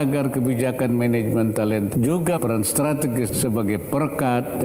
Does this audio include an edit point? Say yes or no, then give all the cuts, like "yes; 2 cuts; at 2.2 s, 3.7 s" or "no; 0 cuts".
yes; 3 cuts; at 1.9 s, 2.4 s, 3.3 s